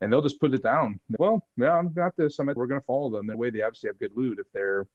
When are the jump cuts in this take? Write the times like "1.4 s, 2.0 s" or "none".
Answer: 1.2 s, 2.6 s, 3.3 s